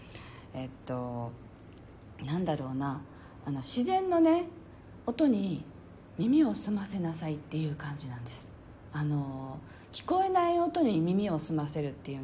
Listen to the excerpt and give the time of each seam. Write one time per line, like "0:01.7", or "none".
0:02.2